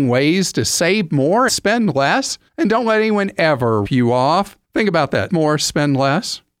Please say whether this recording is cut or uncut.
cut